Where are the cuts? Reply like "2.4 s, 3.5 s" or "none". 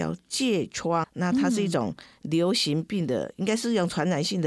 1.0 s